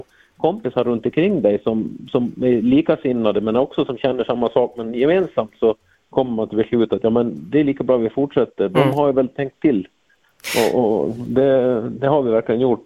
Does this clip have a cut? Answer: no; 0 cuts

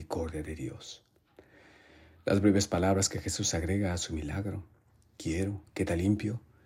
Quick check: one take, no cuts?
yes; 0 cuts

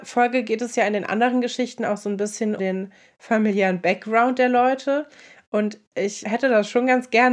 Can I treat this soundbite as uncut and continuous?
no; 2 cuts; at 2.6 s, 6.2 s

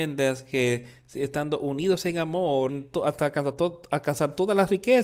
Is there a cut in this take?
yes; 1 cut; at 2.7 s

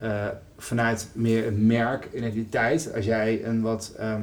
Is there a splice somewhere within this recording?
no; 0 cuts

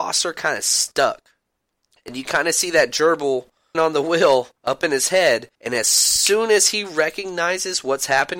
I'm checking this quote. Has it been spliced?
yes; 4 cuts; at 2.2 s, 3.7 s, 4.6 s, 5.5 s

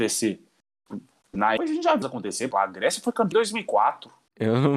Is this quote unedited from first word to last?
no; 4 cuts; at 1.6 s, 2.0 s, 2.5 s, 3.3 s

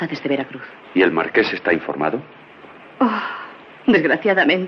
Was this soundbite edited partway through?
no; 0 cuts

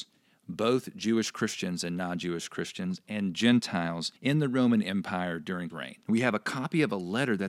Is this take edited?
yes; 3 cuts; at 4.2 s, 5.7 s, 6.0 s

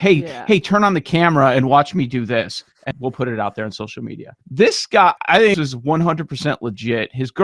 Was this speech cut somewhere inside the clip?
yes; 4 cuts; at 2.9 s, 4.4 s, 5.2 s, 5.5 s

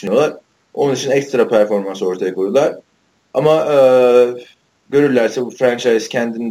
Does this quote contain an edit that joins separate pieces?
no; 0 cuts

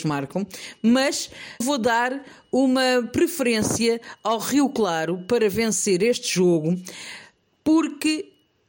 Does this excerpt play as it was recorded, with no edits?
no; 1 cut; at 1.6 s

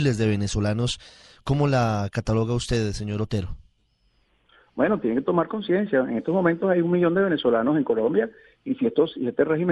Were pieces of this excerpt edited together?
no; 0 cuts

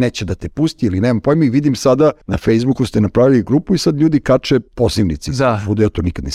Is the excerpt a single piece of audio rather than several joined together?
no; 2 cuts; at 2.2 s, 4.7 s

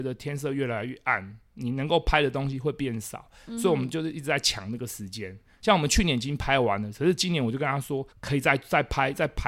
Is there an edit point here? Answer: yes; 1 cut; at 8.1 s

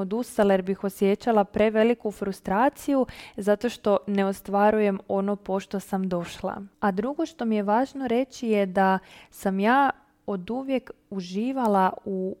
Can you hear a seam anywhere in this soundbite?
no; 0 cuts

